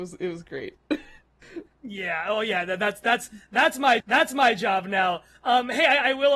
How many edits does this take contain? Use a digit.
1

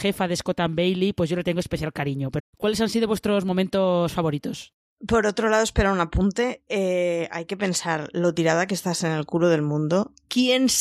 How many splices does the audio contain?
1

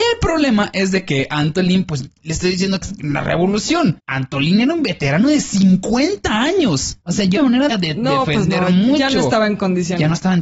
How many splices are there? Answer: 4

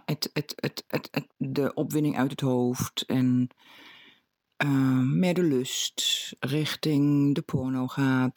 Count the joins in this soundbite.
1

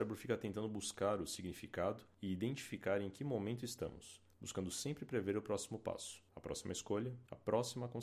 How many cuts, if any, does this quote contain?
0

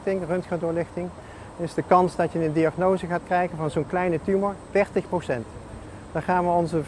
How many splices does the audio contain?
0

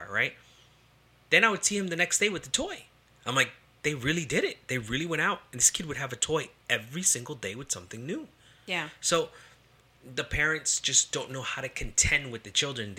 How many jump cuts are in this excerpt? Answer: 0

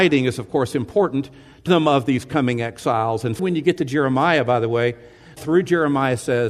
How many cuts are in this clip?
3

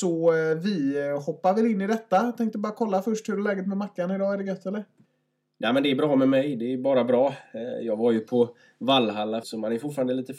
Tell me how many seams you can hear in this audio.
1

